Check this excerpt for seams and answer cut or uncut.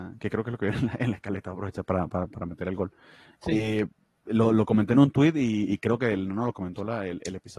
uncut